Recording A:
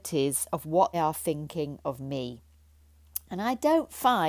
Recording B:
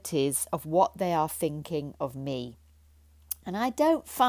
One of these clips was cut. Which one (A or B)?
A